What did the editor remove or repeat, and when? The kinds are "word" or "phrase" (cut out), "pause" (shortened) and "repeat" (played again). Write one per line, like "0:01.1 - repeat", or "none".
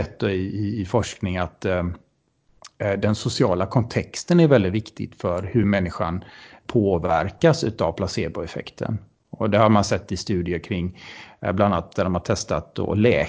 none

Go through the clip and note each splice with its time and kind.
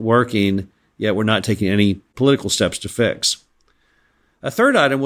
none

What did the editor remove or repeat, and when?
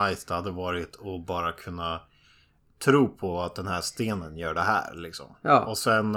none

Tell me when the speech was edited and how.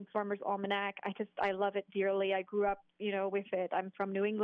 none

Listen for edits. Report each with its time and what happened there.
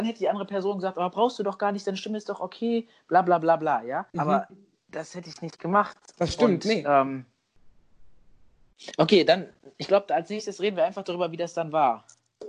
0:04.1 - pause

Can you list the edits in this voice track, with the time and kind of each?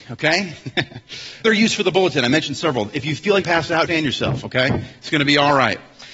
0:01.4 - word
0:03.4 - phrase
0:03.9 - word

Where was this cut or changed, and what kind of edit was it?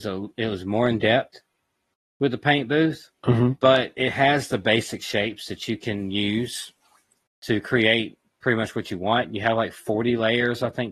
0:03.2 - pause

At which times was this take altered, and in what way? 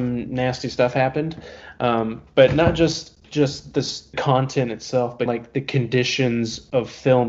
0:03.2 - pause
0:04.1 - word
0:05.3 - word

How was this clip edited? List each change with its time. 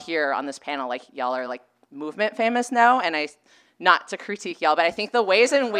none

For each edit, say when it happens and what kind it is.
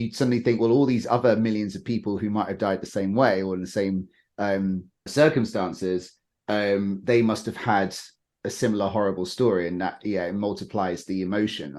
0:05.1 - word

